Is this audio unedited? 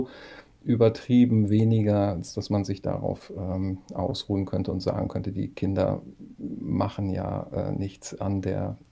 yes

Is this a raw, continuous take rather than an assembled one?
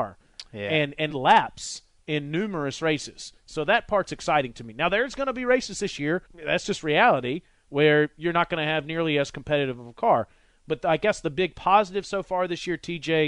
no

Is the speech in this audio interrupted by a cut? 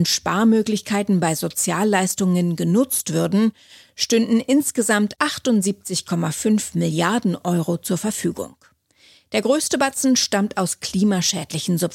no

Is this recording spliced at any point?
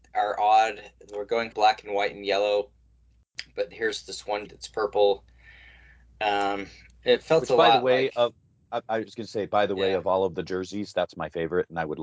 yes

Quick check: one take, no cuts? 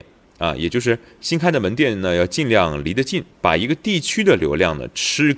no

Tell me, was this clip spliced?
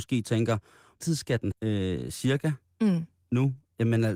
yes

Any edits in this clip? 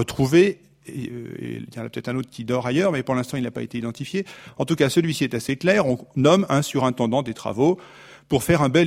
no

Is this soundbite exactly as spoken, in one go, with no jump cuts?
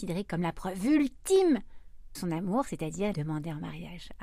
no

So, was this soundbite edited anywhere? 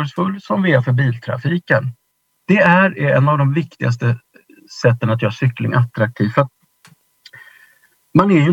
no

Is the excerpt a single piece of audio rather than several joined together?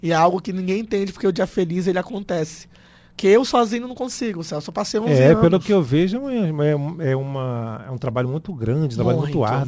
yes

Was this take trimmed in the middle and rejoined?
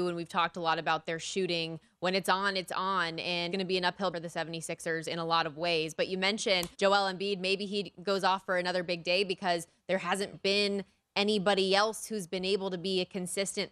yes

